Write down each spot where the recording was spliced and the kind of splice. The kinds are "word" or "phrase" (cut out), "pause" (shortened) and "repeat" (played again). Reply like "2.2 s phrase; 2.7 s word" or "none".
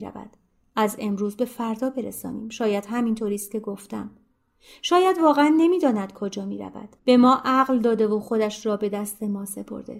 7.0 s pause